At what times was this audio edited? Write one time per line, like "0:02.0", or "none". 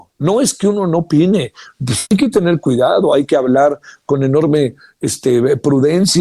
none